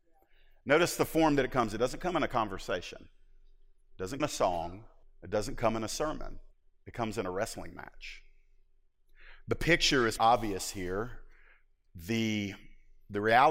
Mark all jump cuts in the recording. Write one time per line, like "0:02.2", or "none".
0:04.2
0:05.0
0:06.5
0:10.2